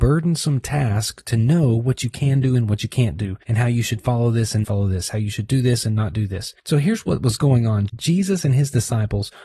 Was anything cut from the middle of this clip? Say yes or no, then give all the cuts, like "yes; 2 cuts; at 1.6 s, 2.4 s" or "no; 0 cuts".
yes; 3 cuts; at 3.4 s, 4.6 s, 6.6 s